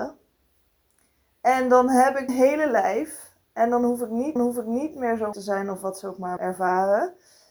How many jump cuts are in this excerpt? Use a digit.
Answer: 4